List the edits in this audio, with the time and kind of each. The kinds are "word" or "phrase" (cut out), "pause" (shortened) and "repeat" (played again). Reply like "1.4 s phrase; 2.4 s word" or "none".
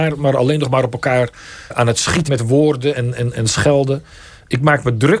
1.7 s word; 2.3 s word; 2.9 s word